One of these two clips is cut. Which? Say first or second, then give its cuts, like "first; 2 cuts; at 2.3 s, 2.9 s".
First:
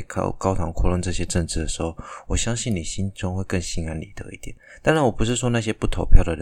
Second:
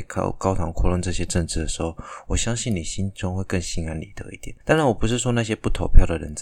second; 1 cut; at 4.6 s